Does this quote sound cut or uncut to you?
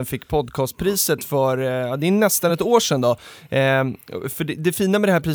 uncut